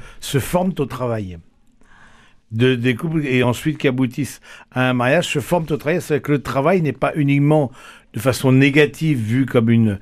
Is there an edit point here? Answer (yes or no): no